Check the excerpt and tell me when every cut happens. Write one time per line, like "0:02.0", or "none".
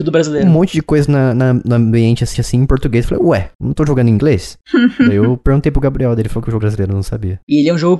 0:02.3
0:06.6

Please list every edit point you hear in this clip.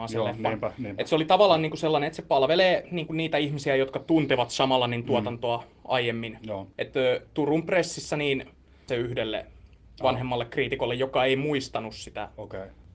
0:07.3
0:08.9

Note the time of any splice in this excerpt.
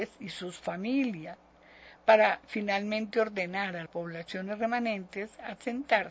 0:03.9

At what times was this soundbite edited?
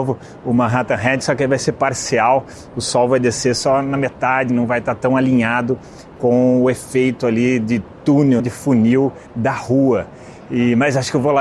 0:04.5
0:08.4
0:09.3

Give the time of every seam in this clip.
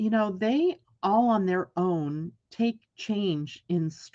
none

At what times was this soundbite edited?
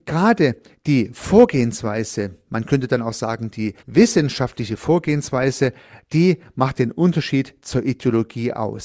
0:03.8

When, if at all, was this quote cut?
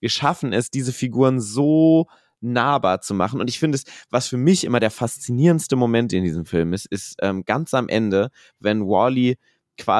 none

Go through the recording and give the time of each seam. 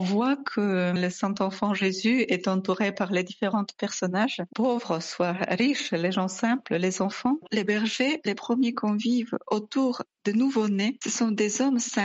none

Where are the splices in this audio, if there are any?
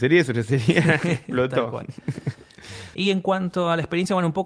none

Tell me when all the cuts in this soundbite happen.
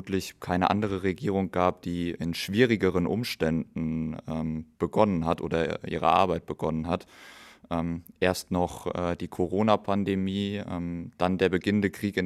none

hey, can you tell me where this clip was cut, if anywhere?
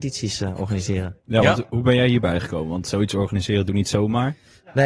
0:03.7

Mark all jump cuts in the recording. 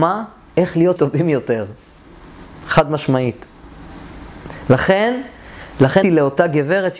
0:01.0
0:06.0

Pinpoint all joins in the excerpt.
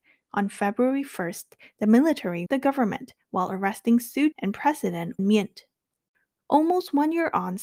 0:02.5
0:04.3
0:05.2

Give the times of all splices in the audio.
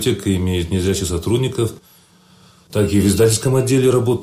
none

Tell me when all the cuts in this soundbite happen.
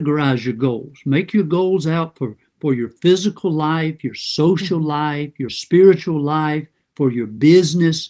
0:05.5

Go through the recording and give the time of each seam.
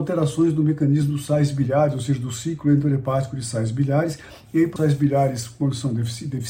0:04.8

